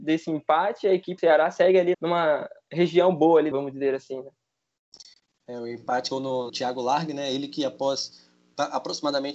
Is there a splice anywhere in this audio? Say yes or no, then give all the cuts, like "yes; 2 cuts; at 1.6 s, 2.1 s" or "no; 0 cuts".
yes; 5 cuts; at 1.2 s, 1.9 s, 3.5 s, 6.1 s, 6.5 s